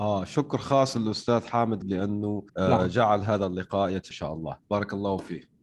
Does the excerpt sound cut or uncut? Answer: cut